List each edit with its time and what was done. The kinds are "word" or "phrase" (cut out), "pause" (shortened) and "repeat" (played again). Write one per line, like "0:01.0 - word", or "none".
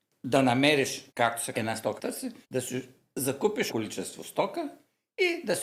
0:01.1 - pause
0:01.5 - phrase
0:02.0 - phrase
0:02.4 - pause
0:03.7 - word